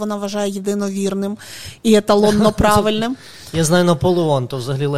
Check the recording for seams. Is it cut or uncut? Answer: uncut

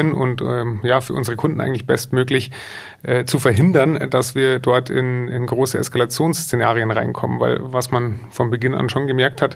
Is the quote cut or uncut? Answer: uncut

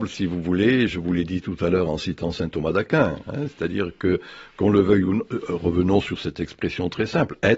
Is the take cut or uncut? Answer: uncut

